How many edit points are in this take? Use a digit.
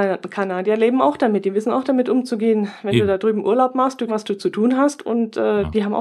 1